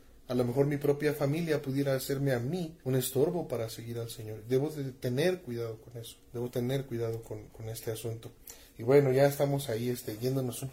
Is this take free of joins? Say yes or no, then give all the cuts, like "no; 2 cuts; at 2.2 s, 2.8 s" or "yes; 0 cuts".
no; 2 cuts; at 2.8 s, 6.2 s